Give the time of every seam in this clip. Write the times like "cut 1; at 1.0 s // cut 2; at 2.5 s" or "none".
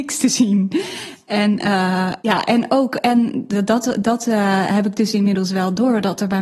cut 1; at 2.2 s